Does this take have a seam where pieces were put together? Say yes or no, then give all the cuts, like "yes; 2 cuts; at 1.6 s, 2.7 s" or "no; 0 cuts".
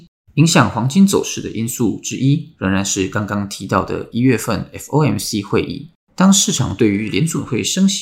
no; 0 cuts